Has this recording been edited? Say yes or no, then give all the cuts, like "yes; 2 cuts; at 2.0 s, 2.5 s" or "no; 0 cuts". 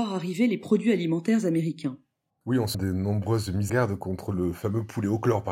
yes; 2 cuts; at 2.7 s, 3.7 s